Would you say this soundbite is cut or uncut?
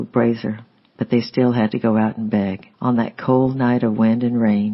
cut